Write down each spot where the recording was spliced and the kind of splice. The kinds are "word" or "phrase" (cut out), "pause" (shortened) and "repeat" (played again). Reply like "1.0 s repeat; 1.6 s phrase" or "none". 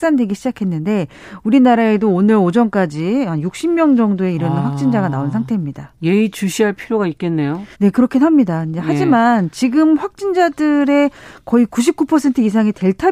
7.7 s pause